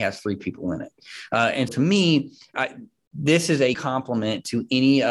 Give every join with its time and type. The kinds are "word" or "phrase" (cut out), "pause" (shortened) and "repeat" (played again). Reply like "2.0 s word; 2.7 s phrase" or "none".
1.7 s word; 2.5 s word; 3.7 s word